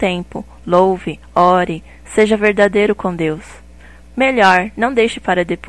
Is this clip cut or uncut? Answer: uncut